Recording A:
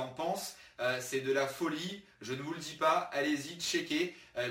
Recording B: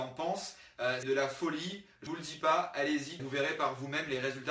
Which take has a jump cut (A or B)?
B